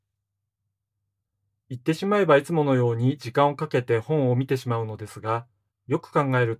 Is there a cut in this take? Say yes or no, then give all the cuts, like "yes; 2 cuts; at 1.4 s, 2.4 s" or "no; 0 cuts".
yes; 1 cut; at 5.7 s